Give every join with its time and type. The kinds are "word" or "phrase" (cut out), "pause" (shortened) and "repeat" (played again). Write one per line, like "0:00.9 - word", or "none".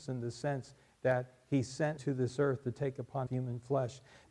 0:02.0 - word
0:03.3 - word